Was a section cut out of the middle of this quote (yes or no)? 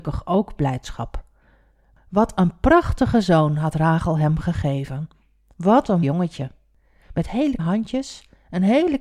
yes